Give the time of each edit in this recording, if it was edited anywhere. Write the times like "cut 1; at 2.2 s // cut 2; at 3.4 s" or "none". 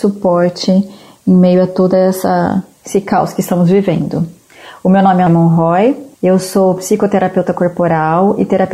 cut 1; at 5.3 s // cut 2; at 6.1 s